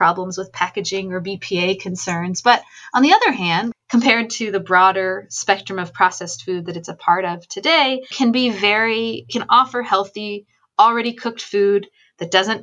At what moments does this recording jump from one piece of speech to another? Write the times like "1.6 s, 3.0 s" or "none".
9.3 s